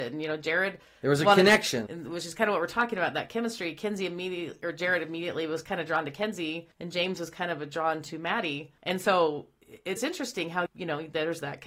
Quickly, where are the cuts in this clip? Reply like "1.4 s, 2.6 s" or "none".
1.9 s, 6.7 s, 8.8 s, 10.0 s, 10.7 s